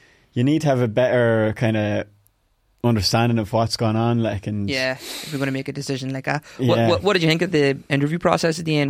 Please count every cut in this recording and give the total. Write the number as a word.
zero